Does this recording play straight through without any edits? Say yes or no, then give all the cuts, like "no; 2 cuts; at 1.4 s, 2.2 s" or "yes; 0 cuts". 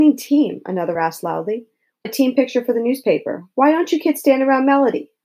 no; 2 cuts; at 1.0 s, 2.1 s